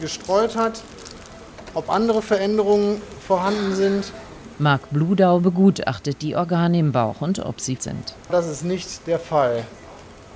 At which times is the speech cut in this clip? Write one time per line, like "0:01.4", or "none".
0:07.8